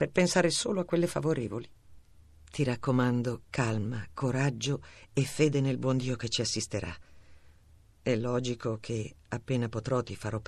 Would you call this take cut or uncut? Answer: uncut